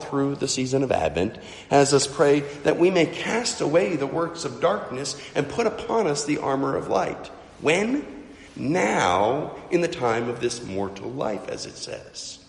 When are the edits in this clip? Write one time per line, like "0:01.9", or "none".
none

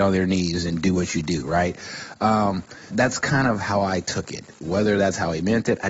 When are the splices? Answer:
0:02.9

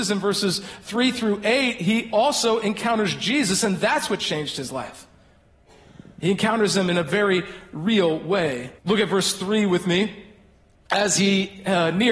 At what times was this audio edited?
0:08.8

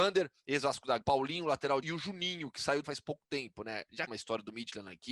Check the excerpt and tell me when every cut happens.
0:01.0
0:01.8
0:02.8
0:04.1

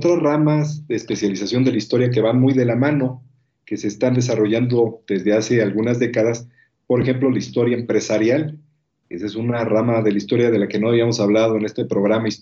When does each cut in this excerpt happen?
none

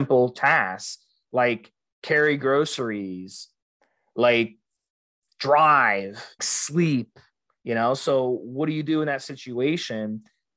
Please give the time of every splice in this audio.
0:06.4

